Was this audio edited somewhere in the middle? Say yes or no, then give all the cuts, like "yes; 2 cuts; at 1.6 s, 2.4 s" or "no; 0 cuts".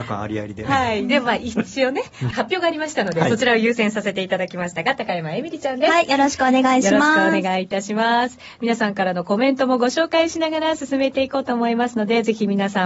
yes; 1 cut; at 2.3 s